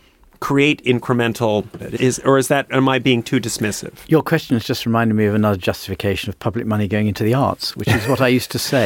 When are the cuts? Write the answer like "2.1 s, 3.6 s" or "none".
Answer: 1.8 s